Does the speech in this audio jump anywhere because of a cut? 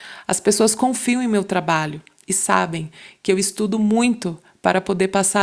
no; 0 cuts

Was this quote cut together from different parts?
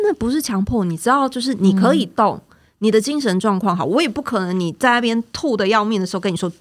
no; 0 cuts

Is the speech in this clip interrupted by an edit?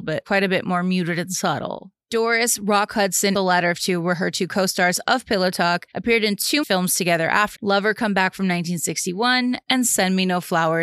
yes; 3 cuts; at 3.3 s, 6.6 s, 7.6 s

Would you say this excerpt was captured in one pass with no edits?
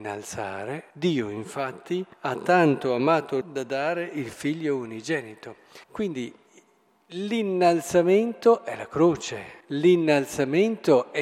no; 5 cuts; at 0.9 s, 2.1 s, 3.4 s, 5.8 s, 9.6 s

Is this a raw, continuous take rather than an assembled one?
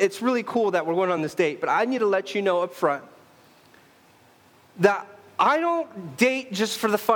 yes; 0 cuts

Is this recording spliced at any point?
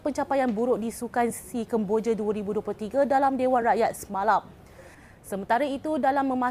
no; 0 cuts

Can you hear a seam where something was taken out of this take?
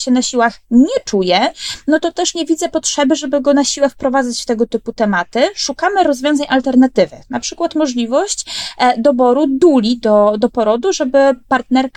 no; 0 cuts

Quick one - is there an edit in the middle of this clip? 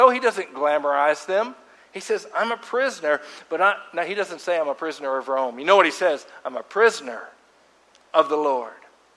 no; 0 cuts

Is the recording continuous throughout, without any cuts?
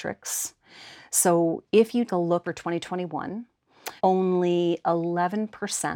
no; 3 cuts; at 2.1 s, 2.4 s, 4.0 s

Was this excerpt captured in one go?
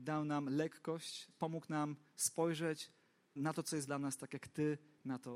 no; 3 cuts; at 1.3 s, 3.4 s, 3.9 s

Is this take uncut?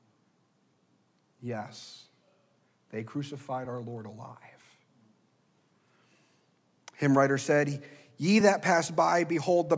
yes; 0 cuts

